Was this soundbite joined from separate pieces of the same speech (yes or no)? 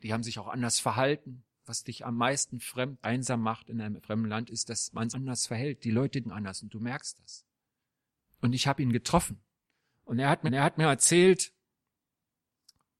yes